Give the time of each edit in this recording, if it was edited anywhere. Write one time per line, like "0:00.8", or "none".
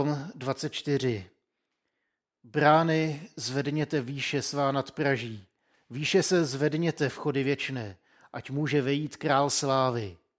none